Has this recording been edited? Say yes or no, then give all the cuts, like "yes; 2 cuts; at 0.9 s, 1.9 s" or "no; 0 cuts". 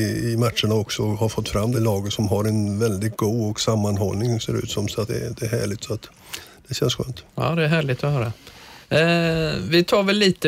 yes; 4 cuts; at 1.7 s, 5.1 s, 7.3 s, 8.8 s